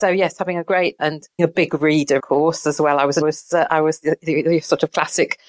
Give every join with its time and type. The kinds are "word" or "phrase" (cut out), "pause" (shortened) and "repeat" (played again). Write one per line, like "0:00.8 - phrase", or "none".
0:01.0 - word
0:01.4 - word
0:02.2 - word
0:03.2 - phrase

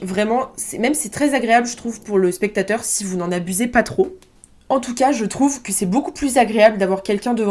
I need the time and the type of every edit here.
none

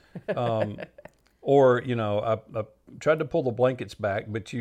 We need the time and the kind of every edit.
none

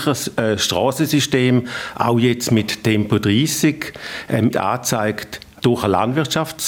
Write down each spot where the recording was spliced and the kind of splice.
0:04.5 - phrase
0:05.6 - word

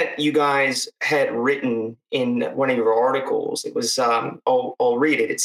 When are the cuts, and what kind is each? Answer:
none

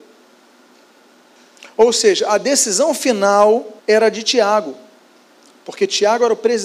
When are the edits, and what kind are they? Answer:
0:03.8 - pause

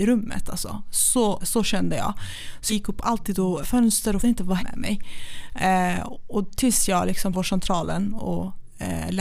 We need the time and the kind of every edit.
0:01.4 - word
0:02.7 - word
0:03.6 - word
0:04.2 - word
0:04.6 - word
0:07.3 - word

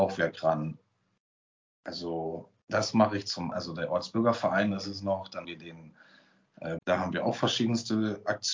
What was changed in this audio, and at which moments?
0:02.6 - pause
0:03.5 - word
0:05.4 - word
0:06.8 - phrase

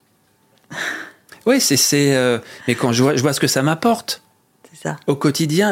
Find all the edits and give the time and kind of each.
none

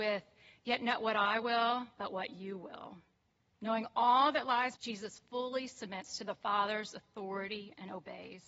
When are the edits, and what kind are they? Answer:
0:04.8 - phrase

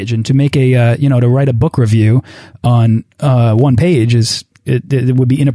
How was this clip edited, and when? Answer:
0:04.5 - pause

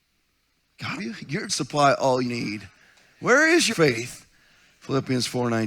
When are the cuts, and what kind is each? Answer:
0:01.0 - phrase
0:01.5 - phrase
0:02.2 - word
0:03.7 - word

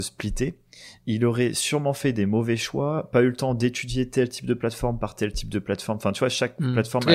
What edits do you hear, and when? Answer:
none

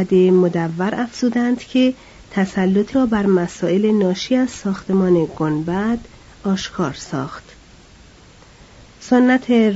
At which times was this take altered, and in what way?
0:02.9 - word

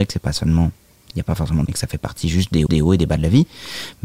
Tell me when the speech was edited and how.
0:01.7 - word
0:02.7 - repeat

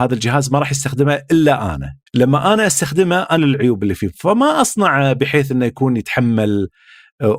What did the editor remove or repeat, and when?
0:02.1 - pause
0:03.4 - phrase

